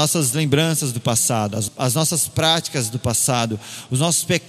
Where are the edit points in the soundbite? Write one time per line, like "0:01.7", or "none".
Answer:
0:01.7